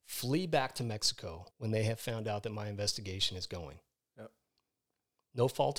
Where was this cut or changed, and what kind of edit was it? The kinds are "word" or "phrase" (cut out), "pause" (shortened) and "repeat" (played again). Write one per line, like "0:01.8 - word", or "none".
0:01.5 - pause